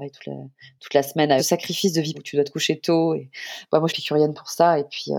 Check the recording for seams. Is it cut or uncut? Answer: cut